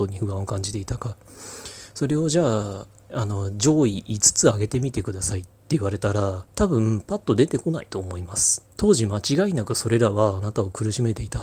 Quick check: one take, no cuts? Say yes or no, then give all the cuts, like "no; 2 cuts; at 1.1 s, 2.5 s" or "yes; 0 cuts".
no; 4 cuts; at 3.1 s, 5.6 s, 6.5 s, 8.7 s